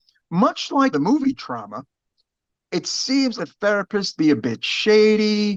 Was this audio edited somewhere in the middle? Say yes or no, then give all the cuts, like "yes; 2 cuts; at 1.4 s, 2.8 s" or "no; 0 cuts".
yes; 3 cuts; at 0.9 s, 3.4 s, 4.2 s